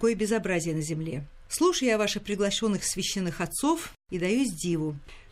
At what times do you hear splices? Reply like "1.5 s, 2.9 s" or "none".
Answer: 4.0 s